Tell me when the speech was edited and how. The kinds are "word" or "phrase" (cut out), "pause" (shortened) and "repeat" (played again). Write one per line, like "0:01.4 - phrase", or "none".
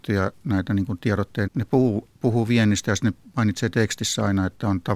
0:01.5 - word